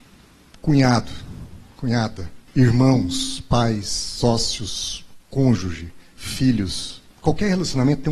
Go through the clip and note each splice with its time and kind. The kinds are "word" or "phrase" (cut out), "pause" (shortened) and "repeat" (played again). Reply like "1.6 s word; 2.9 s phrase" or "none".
2.5 s pause; 5.2 s pause; 7.1 s pause